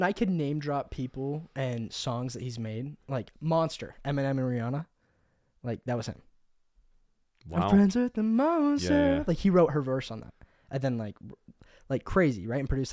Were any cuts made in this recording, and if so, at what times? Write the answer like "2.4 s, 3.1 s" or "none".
none